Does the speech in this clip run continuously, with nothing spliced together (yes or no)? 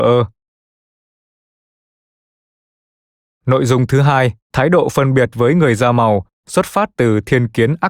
no